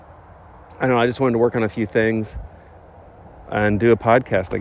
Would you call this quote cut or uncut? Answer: uncut